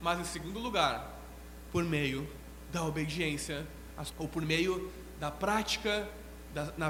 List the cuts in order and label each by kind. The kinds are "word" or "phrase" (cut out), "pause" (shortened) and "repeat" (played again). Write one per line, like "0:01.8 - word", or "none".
0:04.1 - phrase